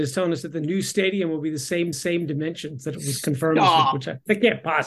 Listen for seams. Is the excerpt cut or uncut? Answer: cut